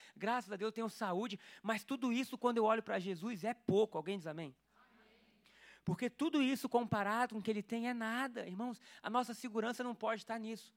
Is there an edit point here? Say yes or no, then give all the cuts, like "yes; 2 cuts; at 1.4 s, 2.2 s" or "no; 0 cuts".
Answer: no; 0 cuts